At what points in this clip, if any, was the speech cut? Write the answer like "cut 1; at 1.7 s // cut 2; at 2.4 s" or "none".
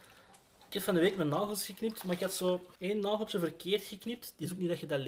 cut 1; at 2.8 s